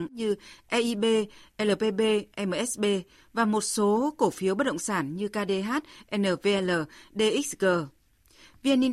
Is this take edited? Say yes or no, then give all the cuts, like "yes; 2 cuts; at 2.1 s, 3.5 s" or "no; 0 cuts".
no; 0 cuts